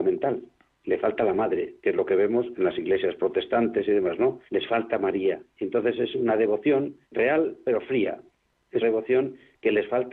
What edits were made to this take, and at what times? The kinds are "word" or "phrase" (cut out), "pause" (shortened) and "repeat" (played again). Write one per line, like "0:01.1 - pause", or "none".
0:01.8 - pause
0:04.5 - pause
0:07.0 - pause
0:08.8 - word